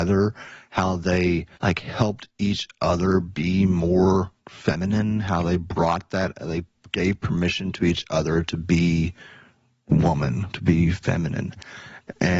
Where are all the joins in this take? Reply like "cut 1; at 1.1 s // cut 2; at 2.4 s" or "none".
cut 1; at 1.5 s // cut 2; at 4.4 s